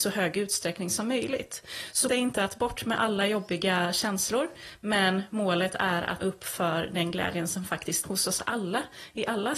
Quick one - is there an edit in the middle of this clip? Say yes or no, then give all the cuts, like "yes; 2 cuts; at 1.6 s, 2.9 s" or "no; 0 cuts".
yes; 3 cuts; at 2.1 s, 6.2 s, 8.0 s